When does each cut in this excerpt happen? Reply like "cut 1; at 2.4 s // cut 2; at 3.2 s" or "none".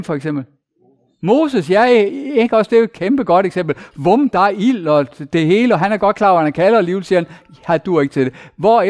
none